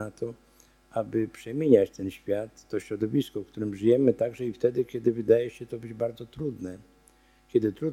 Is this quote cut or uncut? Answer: uncut